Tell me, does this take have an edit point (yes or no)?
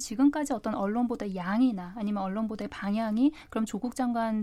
no